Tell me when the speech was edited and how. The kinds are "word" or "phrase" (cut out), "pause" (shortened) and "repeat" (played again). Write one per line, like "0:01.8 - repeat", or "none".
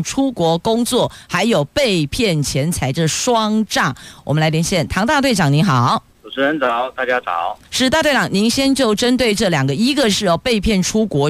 0:07.6 - pause